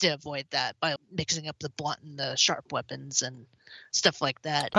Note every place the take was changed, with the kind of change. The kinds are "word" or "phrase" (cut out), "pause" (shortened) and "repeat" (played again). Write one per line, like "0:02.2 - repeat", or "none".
0:01.0 - word